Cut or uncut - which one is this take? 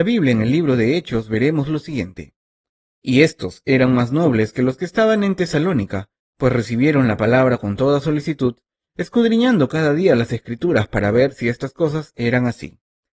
uncut